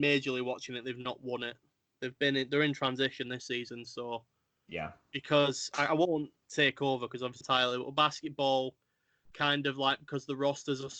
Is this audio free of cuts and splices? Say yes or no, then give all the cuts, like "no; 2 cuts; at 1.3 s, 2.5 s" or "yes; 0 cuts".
no; 1 cut; at 7.4 s